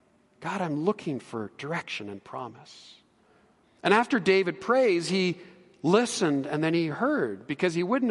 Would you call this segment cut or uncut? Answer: uncut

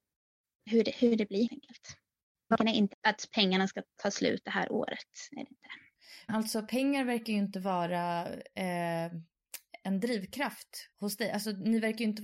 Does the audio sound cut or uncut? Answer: cut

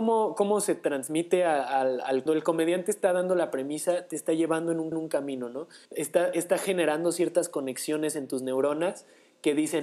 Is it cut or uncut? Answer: cut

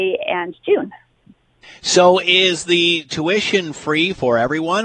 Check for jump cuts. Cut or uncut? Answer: uncut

